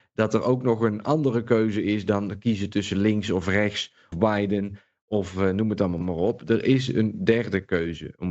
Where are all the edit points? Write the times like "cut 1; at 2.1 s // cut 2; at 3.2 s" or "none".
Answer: cut 1; at 4.1 s